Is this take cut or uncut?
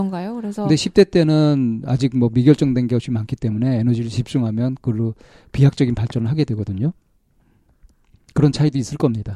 uncut